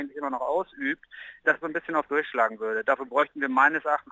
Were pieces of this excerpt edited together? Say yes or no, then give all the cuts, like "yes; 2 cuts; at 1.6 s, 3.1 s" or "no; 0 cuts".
yes; 2 cuts; at 1.6 s, 2.1 s